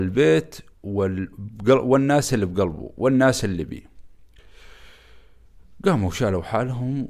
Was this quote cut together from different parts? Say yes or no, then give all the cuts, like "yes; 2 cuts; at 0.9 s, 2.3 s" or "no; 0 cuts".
no; 0 cuts